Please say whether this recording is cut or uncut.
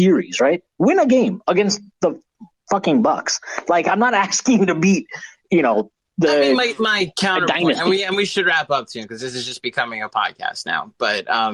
uncut